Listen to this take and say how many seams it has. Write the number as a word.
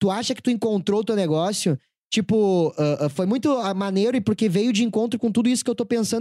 zero